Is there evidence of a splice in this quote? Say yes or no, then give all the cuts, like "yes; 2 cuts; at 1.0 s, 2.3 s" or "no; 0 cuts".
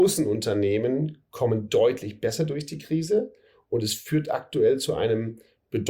no; 0 cuts